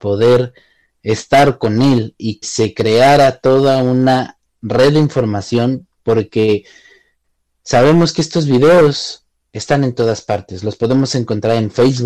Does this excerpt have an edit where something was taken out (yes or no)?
yes